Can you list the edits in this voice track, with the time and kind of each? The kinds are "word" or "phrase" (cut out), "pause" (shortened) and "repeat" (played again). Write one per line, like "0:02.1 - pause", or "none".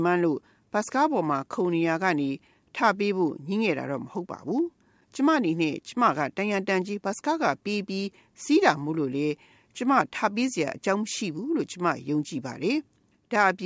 none